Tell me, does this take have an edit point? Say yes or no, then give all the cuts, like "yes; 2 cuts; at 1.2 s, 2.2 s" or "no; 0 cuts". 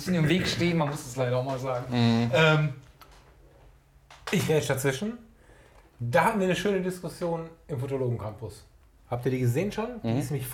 no; 0 cuts